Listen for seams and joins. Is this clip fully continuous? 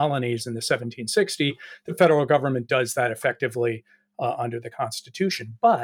yes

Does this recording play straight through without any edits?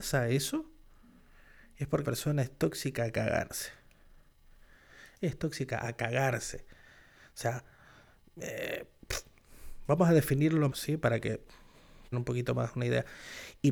no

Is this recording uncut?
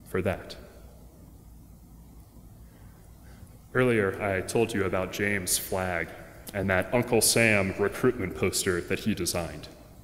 yes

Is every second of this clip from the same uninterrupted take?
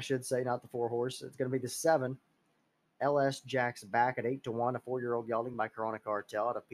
yes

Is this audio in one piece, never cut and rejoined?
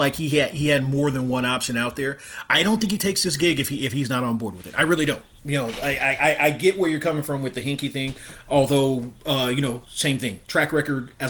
yes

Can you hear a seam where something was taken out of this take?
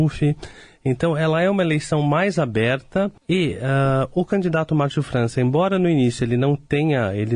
yes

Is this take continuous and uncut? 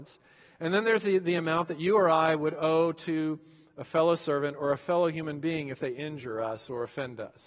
yes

